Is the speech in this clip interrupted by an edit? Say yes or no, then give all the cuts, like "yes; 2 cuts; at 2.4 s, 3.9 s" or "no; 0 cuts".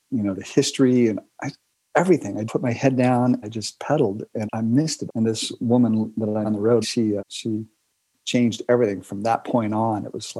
yes; 7 cuts; at 2.5 s, 3.4 s, 4.5 s, 5.1 s, 6.4 s, 6.8 s, 7.2 s